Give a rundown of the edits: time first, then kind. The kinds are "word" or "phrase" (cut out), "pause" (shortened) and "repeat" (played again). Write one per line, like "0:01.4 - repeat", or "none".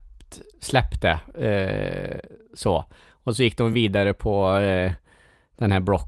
none